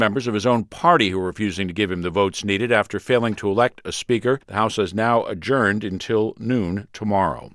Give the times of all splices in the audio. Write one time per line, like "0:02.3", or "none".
0:04.4